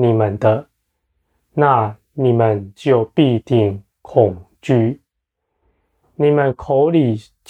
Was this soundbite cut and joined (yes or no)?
no